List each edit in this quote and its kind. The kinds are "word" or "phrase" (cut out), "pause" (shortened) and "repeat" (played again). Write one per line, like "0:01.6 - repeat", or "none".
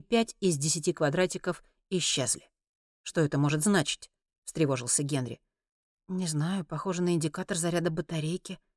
none